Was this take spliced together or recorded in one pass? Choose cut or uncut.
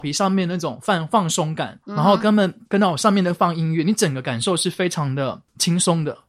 cut